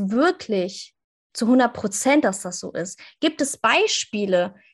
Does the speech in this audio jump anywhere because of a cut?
no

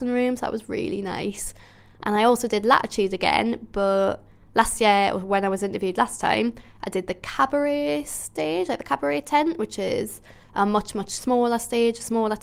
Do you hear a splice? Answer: no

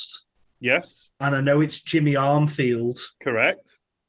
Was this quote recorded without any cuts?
no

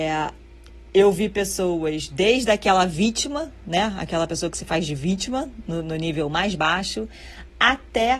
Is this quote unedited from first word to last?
yes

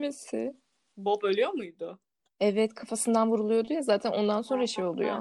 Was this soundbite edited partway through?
no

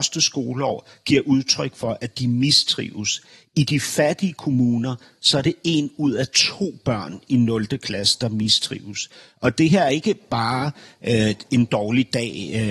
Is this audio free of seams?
yes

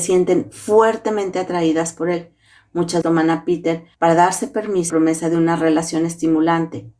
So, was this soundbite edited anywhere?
yes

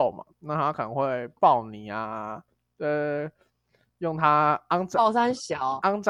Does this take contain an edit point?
no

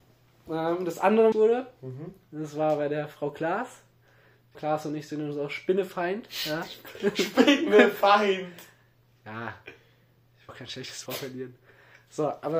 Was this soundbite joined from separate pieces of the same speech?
yes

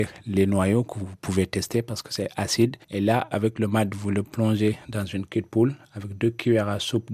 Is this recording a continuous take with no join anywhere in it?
no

